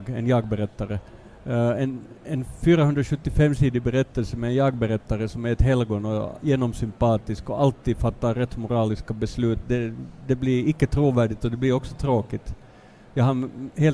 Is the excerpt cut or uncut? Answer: uncut